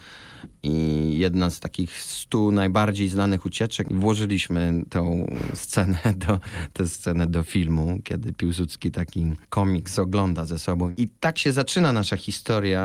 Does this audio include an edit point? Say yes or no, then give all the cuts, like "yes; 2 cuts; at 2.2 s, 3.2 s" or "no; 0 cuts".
yes; 1 cut; at 9.4 s